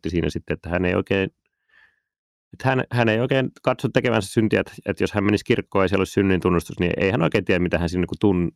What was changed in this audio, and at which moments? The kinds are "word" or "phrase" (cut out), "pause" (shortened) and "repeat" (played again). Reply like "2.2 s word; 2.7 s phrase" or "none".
none